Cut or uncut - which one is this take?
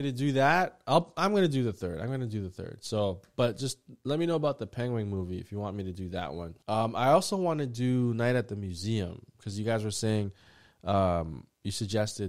cut